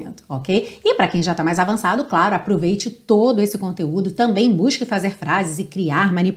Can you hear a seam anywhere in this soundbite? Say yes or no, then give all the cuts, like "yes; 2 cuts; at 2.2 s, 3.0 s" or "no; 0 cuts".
no; 0 cuts